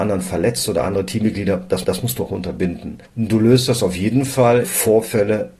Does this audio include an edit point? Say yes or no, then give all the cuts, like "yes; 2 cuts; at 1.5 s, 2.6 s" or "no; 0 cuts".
yes; 4 cuts; at 1.8 s, 2.3 s, 3.1 s, 4.6 s